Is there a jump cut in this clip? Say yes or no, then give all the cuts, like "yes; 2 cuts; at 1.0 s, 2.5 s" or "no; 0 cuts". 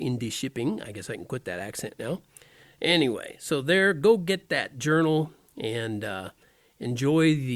no; 0 cuts